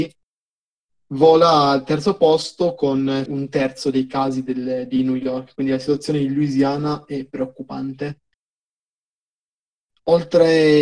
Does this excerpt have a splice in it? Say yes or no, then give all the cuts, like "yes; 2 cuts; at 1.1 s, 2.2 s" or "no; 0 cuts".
yes; 1 cut; at 3.3 s